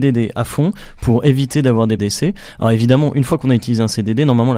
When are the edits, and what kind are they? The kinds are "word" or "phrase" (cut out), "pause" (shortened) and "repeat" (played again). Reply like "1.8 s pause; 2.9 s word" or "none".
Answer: 2.0 s word